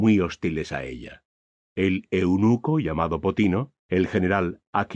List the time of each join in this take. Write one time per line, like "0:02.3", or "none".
0:03.8